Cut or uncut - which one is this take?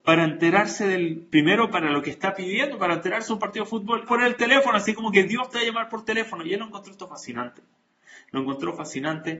cut